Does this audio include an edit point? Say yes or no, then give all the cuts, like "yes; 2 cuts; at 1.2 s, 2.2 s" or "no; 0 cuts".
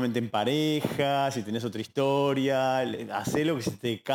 no; 0 cuts